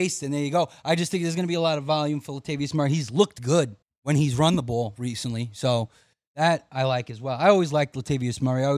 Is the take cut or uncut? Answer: cut